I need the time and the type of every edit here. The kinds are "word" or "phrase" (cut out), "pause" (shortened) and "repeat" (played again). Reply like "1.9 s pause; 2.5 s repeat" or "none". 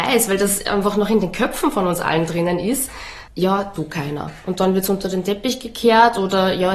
3.8 s phrase